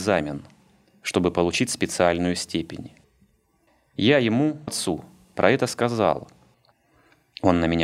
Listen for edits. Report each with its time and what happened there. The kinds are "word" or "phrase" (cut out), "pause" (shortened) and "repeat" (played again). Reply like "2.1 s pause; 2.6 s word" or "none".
4.7 s word